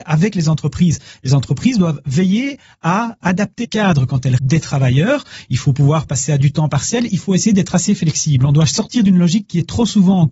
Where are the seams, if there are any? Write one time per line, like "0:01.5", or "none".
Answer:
0:03.2
0:03.6
0:04.4
0:06.1